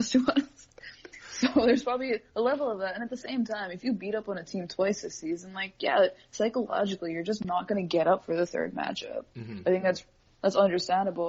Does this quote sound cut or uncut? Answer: uncut